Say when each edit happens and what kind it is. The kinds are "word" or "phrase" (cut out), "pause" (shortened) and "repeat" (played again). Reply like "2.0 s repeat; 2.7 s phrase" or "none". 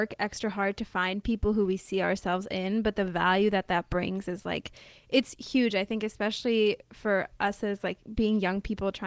none